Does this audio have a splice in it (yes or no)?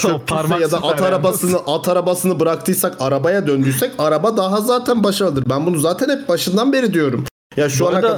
no